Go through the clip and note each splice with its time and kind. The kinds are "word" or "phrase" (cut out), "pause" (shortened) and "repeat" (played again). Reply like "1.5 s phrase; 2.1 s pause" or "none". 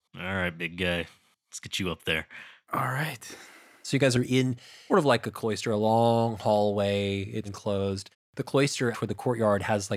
4.9 s word; 7.4 s word; 8.9 s word